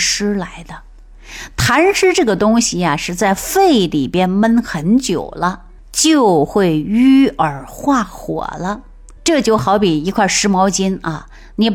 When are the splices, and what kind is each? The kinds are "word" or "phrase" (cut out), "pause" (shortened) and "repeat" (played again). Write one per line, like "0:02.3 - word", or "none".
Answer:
0:05.8 - pause
0:09.2 - pause